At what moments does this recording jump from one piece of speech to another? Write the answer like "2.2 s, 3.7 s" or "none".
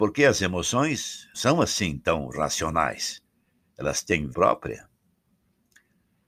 1.3 s, 4.3 s